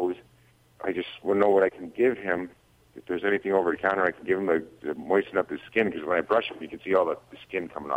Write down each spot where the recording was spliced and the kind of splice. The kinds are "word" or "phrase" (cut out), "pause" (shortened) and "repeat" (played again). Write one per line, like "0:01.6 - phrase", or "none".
none